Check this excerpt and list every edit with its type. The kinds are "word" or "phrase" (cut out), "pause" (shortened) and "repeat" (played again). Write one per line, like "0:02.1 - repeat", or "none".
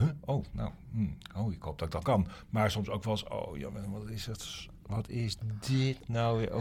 0:02.0 - word

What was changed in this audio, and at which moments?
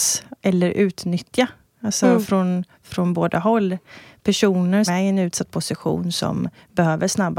0:04.9 - word

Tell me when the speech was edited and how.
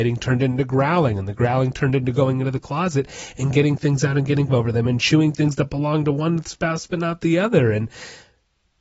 0:04.5 - word

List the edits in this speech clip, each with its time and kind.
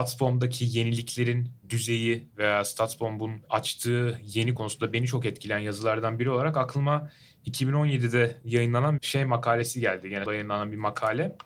0:04.6 - word
0:09.0 - word
0:10.3 - word

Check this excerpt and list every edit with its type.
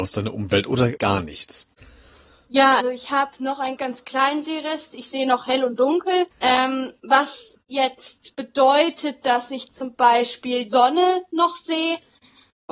0:01.0 - word
0:02.8 - word
0:03.3 - pause
0:03.8 - word
0:06.3 - pause
0:10.7 - word

